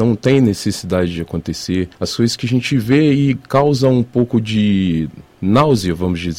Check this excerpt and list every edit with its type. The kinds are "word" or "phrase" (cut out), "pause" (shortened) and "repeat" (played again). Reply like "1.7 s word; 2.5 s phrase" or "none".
1.9 s pause